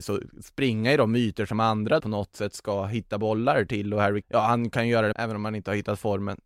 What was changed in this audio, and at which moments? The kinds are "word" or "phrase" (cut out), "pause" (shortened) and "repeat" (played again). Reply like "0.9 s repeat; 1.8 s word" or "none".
2.0 s word; 4.2 s word; 5.1 s word